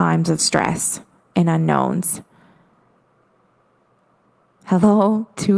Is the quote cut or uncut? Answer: uncut